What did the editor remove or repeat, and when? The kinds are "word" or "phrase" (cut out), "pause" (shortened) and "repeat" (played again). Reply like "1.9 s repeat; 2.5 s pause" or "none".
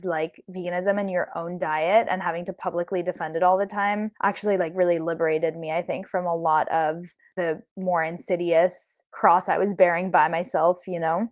4.2 s pause

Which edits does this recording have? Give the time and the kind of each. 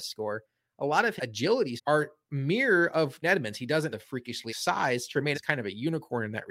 1.2 s word; 1.8 s word; 3.2 s word; 3.9 s word; 4.5 s word; 5.3 s word

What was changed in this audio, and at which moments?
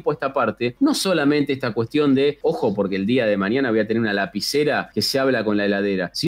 none

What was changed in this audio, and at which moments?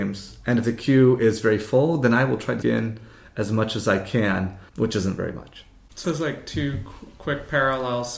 2.6 s word; 4.7 s pause; 6.0 s word

